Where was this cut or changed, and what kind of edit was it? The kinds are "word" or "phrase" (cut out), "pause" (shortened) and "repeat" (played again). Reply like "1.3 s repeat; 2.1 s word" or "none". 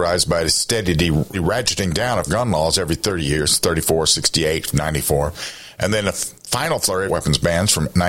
1.3 s word; 2.3 s word; 6.4 s pause; 7.1 s phrase